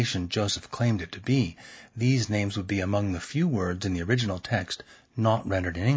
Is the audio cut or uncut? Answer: uncut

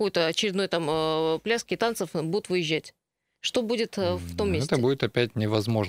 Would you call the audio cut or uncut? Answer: uncut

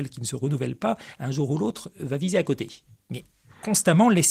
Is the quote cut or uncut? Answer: uncut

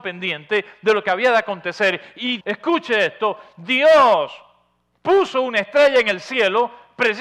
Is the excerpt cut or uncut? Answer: cut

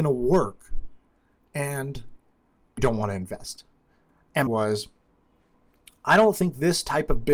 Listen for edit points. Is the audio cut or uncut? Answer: cut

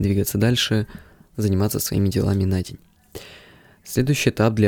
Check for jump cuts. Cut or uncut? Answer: uncut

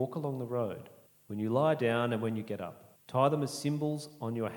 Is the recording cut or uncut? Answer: cut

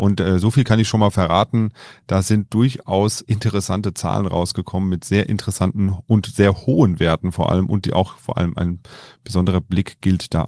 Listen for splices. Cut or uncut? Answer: cut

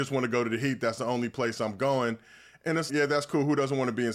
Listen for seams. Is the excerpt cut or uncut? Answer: cut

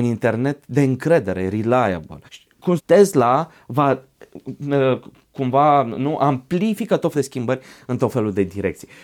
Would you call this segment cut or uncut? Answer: cut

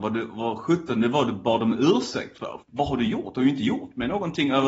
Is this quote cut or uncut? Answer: uncut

